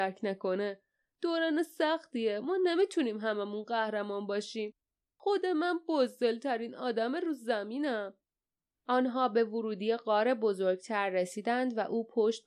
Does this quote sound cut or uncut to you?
uncut